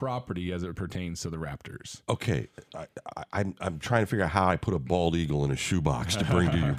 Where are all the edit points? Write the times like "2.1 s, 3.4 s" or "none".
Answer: none